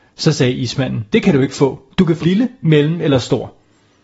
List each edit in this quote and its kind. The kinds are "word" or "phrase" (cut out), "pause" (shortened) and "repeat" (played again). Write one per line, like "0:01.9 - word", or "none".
0:01.1 - word
0:02.2 - word